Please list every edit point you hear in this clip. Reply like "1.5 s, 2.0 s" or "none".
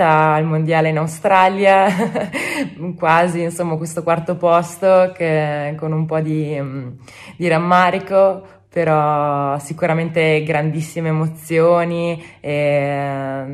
none